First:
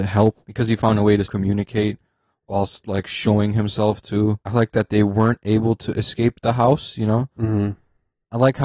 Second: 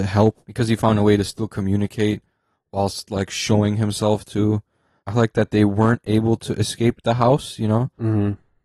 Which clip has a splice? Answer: first; 2 cuts; at 1.3 s, 4.4 s

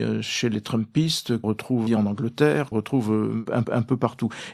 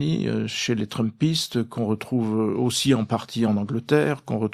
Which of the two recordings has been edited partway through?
first; 4 cuts; at 1.4 s, 1.9 s, 2.7 s, 3.6 s

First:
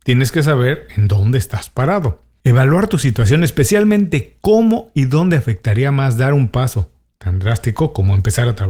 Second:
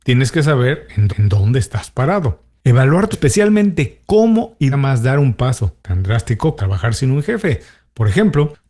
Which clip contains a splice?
second; 5 cuts; at 1.1 s, 3.1 s, 4.7 s, 5.8 s, 6.6 s

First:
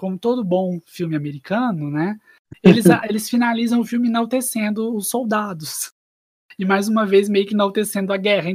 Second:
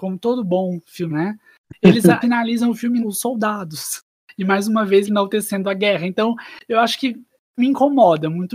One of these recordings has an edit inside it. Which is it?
second; 6 cuts; at 1.1 s, 2.2 s, 3.0 s, 4.1 s, 5.0 s, 7.6 s

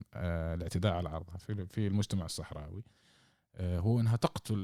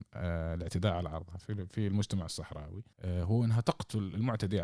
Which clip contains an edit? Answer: second; 1 cut; at 2.9 s

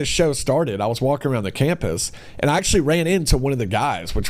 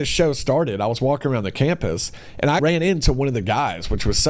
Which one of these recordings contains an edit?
second; 1 cut; at 2.6 s

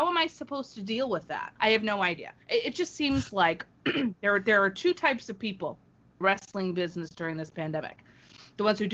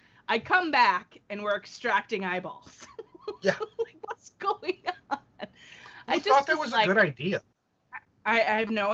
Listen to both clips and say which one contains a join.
first; 4 cuts; at 1.6 s, 2.4 s, 2.7 s, 6.2 s

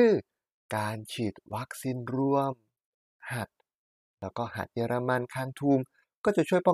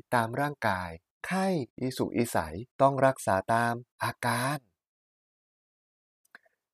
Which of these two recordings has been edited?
second; 4 cuts; at 1.1 s, 1.7 s, 2.7 s, 3.9 s

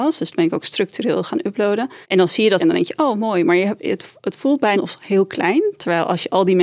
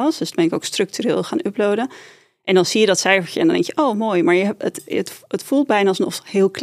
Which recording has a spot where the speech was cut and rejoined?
first; 4 cuts; at 2.0 s, 2.6 s, 3.8 s, 4.7 s

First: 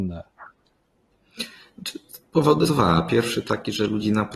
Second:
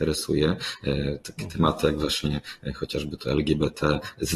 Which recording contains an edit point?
first; 1 cut; at 2.7 s

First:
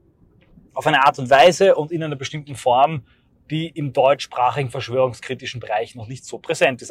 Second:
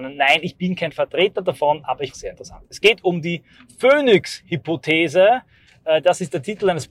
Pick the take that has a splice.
second; 1 cut; at 2.1 s

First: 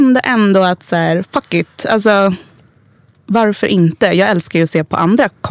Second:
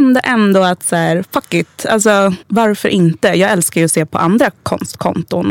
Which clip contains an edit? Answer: second; 1 cut; at 2.4 s

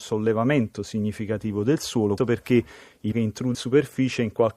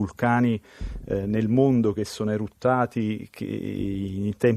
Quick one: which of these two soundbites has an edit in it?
first; 3 cuts; at 2.2 s, 3.1 s, 3.5 s

